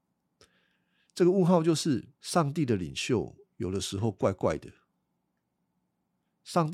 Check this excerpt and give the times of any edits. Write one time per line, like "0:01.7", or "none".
0:02.1